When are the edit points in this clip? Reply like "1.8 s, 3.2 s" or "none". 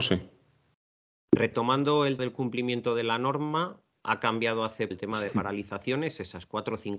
2.2 s, 4.9 s, 5.3 s